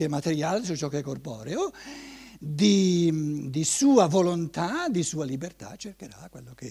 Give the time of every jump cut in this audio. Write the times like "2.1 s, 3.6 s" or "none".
none